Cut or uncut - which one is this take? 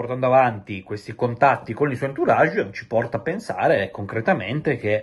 uncut